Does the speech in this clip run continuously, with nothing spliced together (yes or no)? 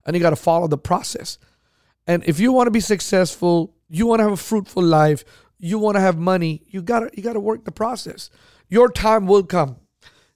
yes